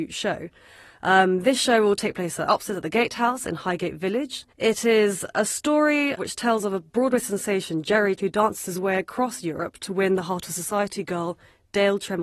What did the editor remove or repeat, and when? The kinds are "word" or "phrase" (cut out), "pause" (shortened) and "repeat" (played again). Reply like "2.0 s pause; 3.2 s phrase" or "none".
4.5 s pause; 6.2 s word; 8.2 s word